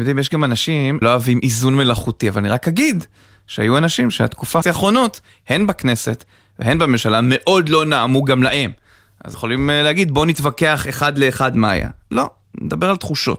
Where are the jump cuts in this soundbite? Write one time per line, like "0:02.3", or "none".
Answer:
0:01.0
0:04.6
0:09.3